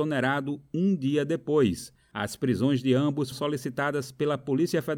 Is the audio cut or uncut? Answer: cut